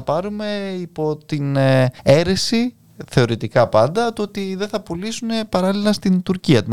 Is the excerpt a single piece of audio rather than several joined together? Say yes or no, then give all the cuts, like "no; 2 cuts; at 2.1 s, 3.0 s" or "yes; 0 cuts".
no; 1 cut; at 2.0 s